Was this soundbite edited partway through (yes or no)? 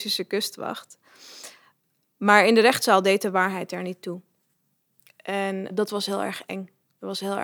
no